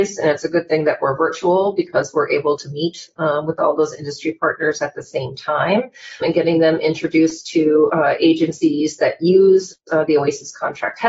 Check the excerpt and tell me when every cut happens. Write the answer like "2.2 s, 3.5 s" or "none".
6.2 s